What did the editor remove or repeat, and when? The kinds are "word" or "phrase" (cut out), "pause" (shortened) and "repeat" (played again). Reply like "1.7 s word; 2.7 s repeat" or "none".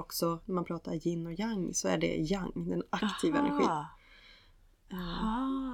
none

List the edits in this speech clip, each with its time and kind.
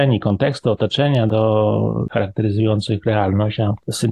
2.1 s word

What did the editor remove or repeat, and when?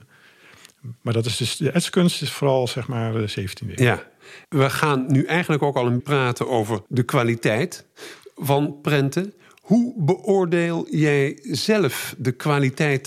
4.4 s pause; 6.0 s word; 6.9 s pause

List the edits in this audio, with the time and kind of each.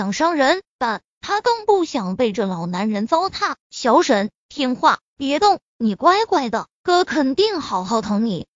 3.6 s pause

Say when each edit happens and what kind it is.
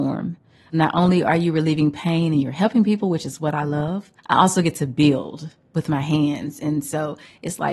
4.2 s pause

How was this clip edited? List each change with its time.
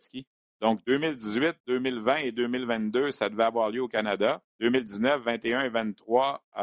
4.5 s pause

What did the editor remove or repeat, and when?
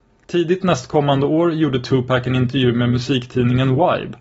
none

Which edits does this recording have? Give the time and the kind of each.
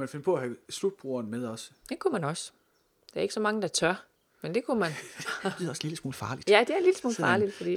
none

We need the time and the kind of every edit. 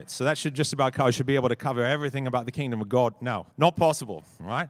3.5 s pause

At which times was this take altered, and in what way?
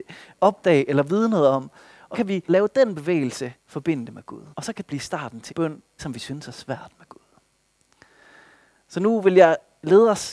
2.1 s word; 2.5 s phrase; 3.6 s pause; 4.5 s pause; 4.9 s phrase; 5.5 s word; 6.0 s phrase

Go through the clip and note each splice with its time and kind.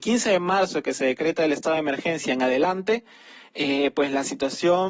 none

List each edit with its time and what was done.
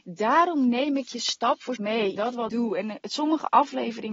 1.8 s word; 2.2 s word; 2.5 s word

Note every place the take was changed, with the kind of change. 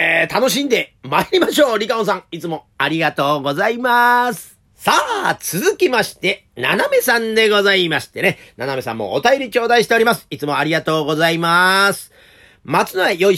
4.7 s pause

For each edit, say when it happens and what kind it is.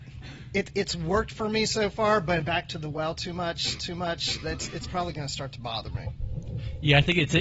2.4 s phrase; 3.8 s repeat

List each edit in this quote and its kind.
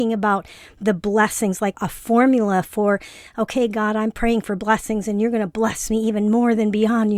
1.7 s word

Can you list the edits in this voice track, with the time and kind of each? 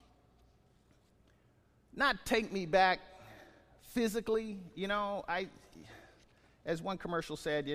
none

